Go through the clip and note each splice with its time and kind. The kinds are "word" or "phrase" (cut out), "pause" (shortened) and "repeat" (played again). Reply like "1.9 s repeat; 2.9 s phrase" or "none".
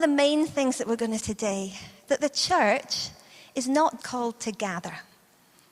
1.2 s word; 2.1 s word; 4.0 s word